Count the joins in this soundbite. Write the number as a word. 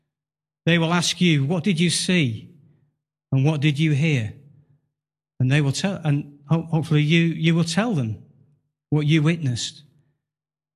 zero